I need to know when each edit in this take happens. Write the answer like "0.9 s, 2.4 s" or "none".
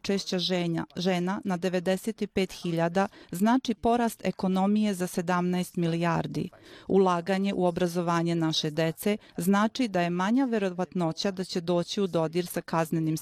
none